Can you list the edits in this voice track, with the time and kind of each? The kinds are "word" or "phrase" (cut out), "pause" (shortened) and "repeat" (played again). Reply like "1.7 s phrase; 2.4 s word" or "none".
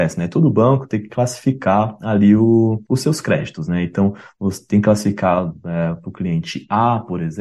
none